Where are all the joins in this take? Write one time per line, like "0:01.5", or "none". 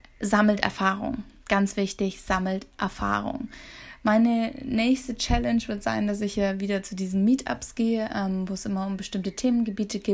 none